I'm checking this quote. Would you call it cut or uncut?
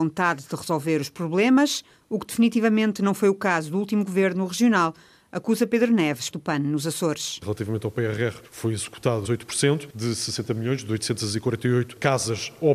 cut